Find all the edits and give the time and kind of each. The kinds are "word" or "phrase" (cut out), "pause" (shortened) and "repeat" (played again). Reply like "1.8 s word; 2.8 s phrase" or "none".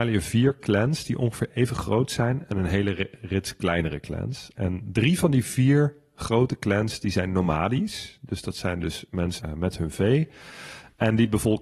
9.4 s phrase